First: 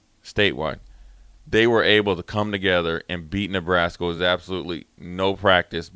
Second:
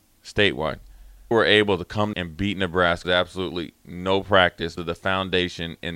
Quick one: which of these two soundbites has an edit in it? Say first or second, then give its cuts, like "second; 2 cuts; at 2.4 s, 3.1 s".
second; 4 cuts; at 1.3 s, 2.1 s, 3.0 s, 4.8 s